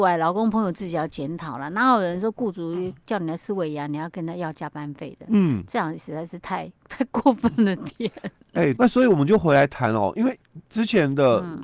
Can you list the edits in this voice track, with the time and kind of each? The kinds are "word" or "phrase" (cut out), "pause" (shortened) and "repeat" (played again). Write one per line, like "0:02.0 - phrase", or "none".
0:06.8 - pause
0:08.8 - phrase
0:10.7 - pause